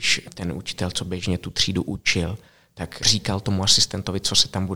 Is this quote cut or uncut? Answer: uncut